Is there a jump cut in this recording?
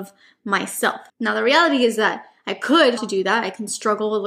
yes; 2 cuts; at 1.1 s, 3.0 s

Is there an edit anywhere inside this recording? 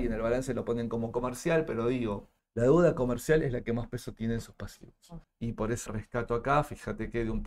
yes; 3 cuts; at 2.4 s, 5.2 s, 5.9 s

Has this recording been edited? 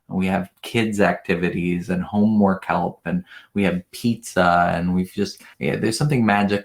yes; 1 cut; at 5.5 s

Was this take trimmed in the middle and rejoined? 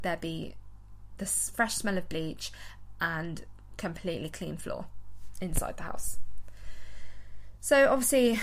no; 0 cuts

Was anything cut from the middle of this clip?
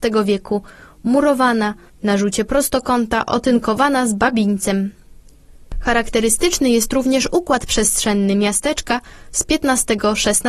no; 0 cuts

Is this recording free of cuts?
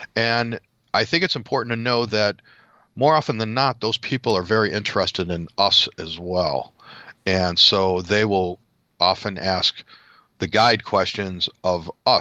yes; 0 cuts

